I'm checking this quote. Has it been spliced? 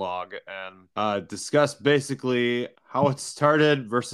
yes; 2 cuts; at 0.9 s, 2.8 s

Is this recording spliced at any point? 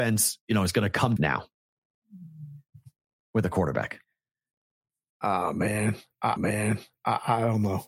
yes; 2 cuts; at 1.2 s, 6.4 s

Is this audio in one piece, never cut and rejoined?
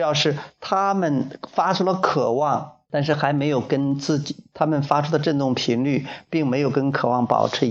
no; 1 cut; at 2.8 s

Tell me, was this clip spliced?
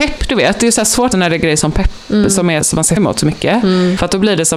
yes; 3 cuts; at 1.1 s, 2.6 s, 3.0 s

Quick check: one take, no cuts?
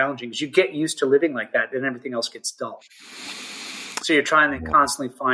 yes; 0 cuts

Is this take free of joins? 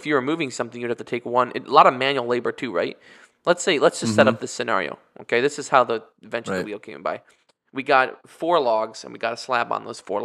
yes; 0 cuts

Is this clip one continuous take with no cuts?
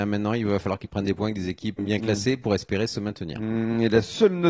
no; 1 cut; at 1.8 s

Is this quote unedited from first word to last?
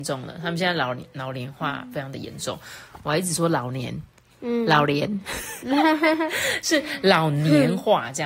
yes; 0 cuts

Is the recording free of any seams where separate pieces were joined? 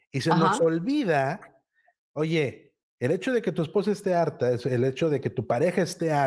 no; 1 cut; at 2.8 s

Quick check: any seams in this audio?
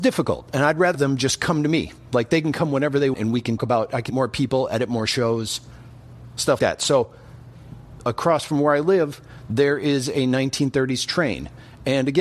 yes; 5 cuts; at 0.9 s, 3.1 s, 3.6 s, 4.1 s, 6.6 s

